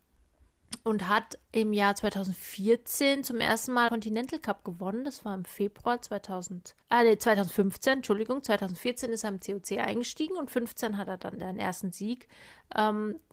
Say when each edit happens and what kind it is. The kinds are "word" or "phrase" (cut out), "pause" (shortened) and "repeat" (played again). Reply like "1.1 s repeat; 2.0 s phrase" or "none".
3.9 s word; 6.8 s pause